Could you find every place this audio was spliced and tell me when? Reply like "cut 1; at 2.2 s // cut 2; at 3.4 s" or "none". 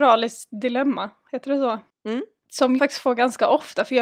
cut 1; at 2.8 s